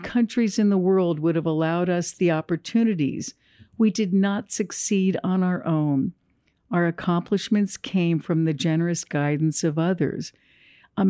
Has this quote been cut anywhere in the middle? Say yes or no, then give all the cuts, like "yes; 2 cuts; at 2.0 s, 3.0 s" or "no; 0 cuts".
no; 0 cuts